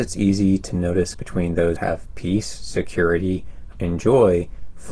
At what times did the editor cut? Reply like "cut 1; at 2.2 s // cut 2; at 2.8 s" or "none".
cut 1; at 1.1 s // cut 2; at 1.8 s // cut 3; at 3.7 s